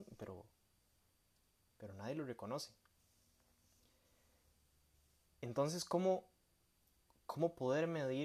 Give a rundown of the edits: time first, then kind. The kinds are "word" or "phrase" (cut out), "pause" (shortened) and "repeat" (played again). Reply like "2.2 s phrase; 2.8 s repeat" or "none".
none

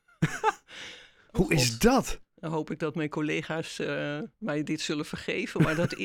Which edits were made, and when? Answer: 4.3 s pause

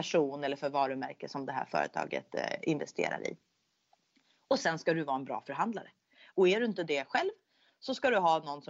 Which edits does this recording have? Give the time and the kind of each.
none

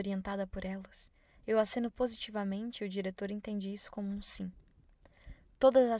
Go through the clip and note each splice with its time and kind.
none

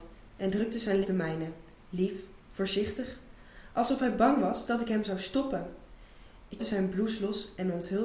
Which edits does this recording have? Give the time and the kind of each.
1.0 s phrase; 2.4 s pause; 6.6 s word

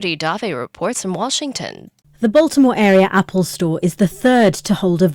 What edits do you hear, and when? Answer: none

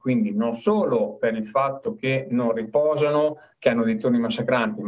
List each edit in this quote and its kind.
none

